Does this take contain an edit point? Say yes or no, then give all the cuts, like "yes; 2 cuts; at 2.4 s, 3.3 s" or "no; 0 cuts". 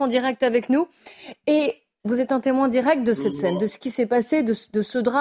no; 0 cuts